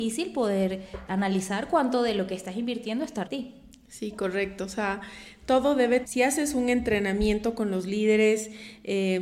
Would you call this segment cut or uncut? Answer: cut